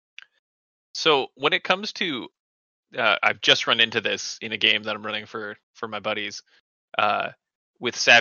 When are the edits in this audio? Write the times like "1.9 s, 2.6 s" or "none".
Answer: 5.6 s

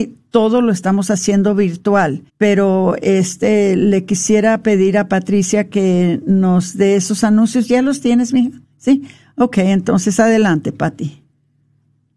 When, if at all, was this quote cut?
2.3 s, 8.6 s

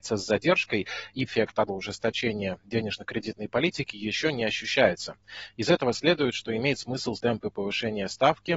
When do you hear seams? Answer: 1.3 s, 1.7 s, 7.1 s

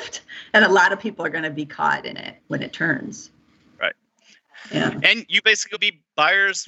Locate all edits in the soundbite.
2.4 s, 5.7 s

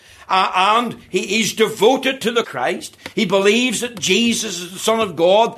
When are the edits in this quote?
2.4 s

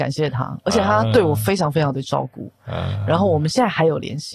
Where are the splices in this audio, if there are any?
none

